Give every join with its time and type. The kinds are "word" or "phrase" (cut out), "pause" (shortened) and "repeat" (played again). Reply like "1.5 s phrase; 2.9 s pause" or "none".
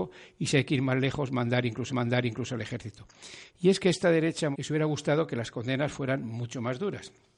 1.9 s repeat; 4.5 s word